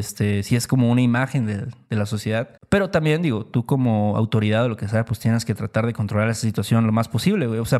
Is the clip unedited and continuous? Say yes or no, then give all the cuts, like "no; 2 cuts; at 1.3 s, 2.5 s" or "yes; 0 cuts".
no; 1 cut; at 2.6 s